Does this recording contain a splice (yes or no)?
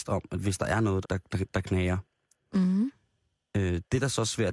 yes